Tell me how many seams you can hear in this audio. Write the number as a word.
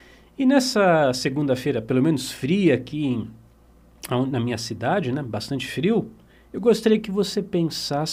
zero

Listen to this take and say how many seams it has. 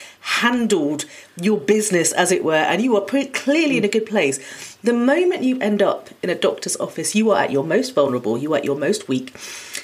one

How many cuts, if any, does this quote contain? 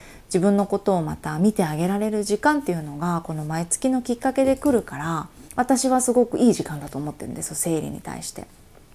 one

